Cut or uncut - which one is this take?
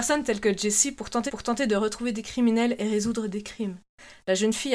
cut